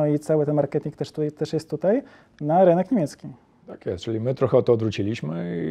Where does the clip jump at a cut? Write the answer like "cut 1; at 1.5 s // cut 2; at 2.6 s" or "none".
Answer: none